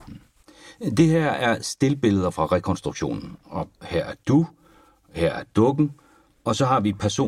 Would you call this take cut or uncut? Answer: uncut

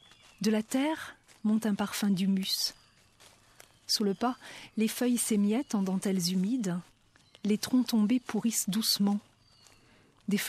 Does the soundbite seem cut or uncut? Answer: uncut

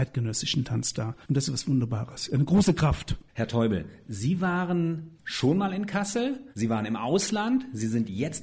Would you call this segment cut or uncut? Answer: cut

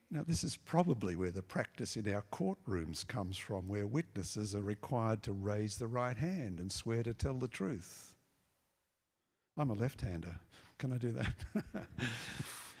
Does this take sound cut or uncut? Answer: uncut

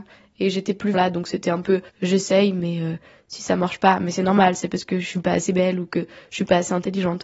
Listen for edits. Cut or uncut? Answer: cut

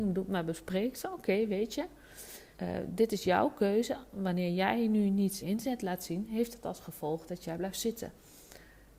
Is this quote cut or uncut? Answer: cut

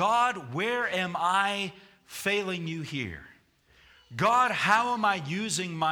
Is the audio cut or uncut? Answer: uncut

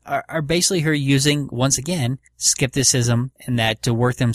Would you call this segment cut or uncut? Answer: cut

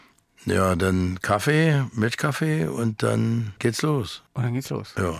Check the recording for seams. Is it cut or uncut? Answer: cut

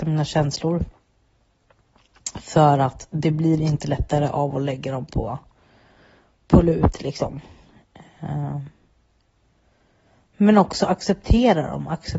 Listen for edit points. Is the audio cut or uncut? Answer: uncut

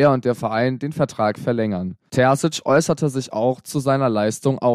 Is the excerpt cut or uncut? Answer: uncut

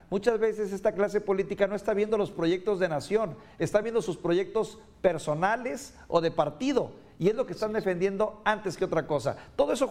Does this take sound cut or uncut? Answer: uncut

